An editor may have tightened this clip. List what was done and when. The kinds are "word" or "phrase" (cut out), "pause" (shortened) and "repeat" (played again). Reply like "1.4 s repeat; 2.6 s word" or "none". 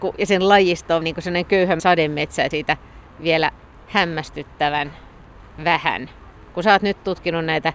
1.0 s word; 1.8 s word; 2.5 s phrase